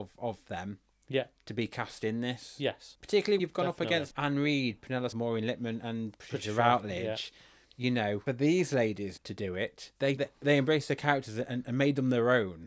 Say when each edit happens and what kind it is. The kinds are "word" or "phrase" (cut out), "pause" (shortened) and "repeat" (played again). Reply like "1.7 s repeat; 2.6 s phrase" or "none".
3.4 s word; 4.1 s word; 5.1 s word; 8.3 s word; 9.2 s word; 10.2 s word